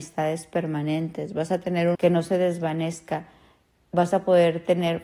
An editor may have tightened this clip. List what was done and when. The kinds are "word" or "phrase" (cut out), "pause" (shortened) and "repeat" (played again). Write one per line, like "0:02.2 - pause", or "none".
0:01.9 - word